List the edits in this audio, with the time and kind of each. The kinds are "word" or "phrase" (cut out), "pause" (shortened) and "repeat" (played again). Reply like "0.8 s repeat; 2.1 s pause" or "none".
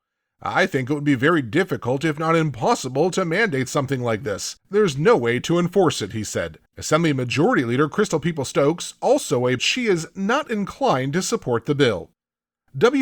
4.6 s pause; 6.7 s pause; 9.6 s phrase